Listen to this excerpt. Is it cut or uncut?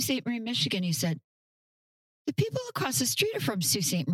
uncut